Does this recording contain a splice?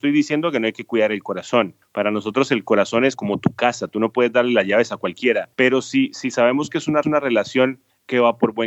yes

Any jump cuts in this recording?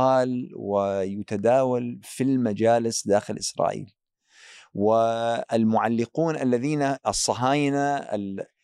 no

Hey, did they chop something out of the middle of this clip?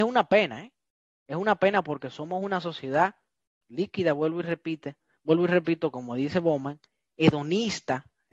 no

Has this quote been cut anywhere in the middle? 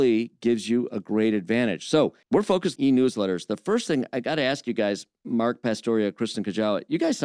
yes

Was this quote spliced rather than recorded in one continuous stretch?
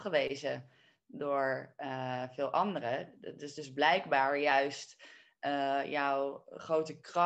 no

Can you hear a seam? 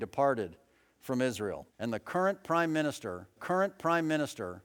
yes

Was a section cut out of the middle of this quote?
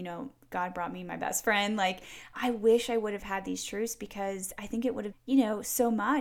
yes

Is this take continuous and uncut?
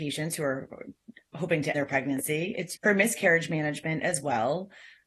no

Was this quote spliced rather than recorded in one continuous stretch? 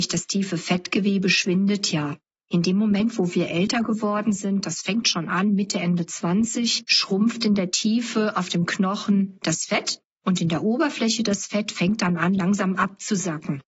no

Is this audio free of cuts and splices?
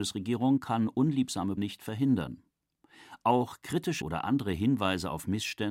no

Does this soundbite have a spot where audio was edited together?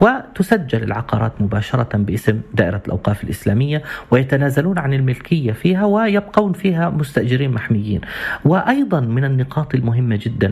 no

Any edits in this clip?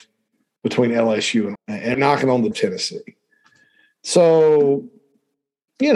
yes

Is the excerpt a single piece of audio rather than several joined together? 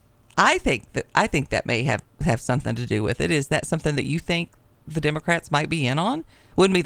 yes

